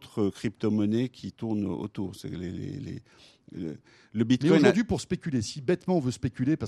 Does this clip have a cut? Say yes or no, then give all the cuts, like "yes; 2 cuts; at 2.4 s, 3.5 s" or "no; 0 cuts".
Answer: no; 0 cuts